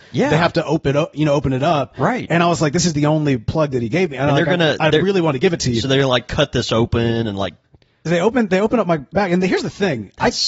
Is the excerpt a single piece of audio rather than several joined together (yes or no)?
yes